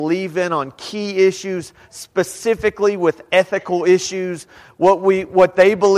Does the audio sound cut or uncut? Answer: uncut